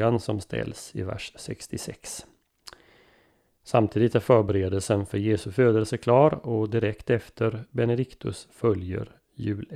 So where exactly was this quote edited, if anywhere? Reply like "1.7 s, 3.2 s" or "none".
none